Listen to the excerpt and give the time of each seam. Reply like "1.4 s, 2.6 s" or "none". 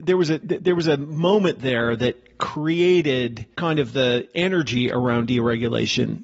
3.5 s